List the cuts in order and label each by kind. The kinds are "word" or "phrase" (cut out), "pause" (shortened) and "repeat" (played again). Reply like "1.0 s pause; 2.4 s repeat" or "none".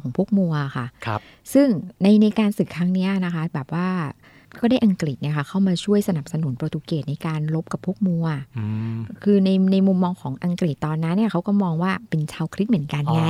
none